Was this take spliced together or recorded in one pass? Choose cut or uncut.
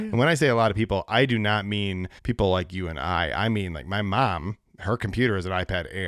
cut